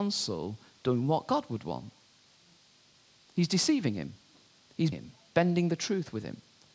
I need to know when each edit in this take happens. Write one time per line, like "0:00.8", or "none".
0:04.9